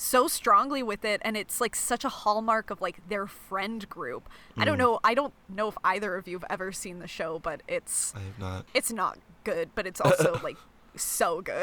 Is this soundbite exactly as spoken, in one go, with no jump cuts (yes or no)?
yes